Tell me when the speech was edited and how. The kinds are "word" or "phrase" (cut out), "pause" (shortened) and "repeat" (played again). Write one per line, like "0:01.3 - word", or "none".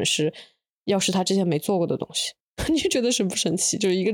0:02.4 - pause